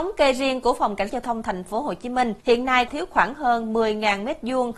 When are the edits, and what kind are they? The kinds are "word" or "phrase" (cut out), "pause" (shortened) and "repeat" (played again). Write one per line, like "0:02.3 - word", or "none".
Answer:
0:01.1 - word
0:02.4 - pause
0:02.9 - word